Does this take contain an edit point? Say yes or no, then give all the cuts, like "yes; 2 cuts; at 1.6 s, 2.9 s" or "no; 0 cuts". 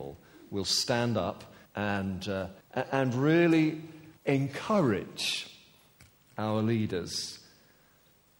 yes; 3 cuts; at 1.7 s, 2.6 s, 4.2 s